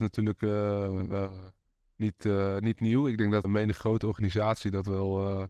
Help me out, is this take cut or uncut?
cut